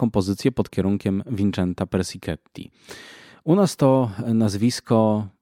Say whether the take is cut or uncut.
uncut